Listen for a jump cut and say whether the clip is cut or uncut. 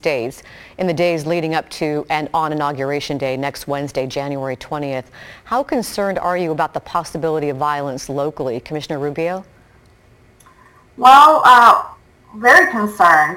uncut